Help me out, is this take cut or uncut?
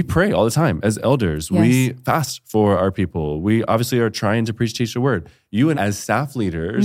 cut